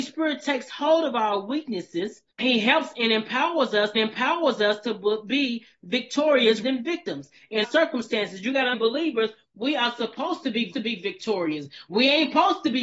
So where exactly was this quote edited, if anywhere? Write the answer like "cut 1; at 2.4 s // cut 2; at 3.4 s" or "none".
cut 1; at 2.3 s // cut 2; at 3.9 s // cut 3; at 6.6 s // cut 4; at 7.6 s // cut 5; at 8.7 s // cut 6; at 10.7 s